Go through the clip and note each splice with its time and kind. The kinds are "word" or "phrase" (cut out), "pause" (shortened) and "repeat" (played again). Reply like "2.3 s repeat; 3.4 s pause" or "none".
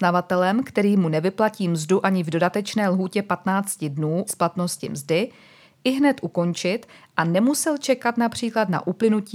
4.3 s phrase